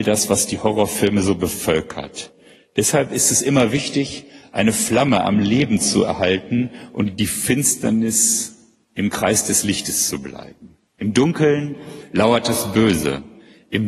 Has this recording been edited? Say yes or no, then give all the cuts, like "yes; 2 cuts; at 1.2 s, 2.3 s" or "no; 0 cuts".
yes; 2 cuts; at 7.2 s, 10.9 s